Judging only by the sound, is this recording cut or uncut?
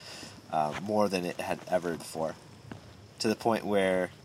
cut